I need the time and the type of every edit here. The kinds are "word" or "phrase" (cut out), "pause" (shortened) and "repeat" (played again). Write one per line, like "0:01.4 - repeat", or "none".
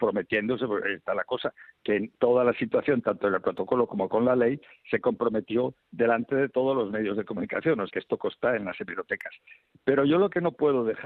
0:02.1 - word
0:07.9 - word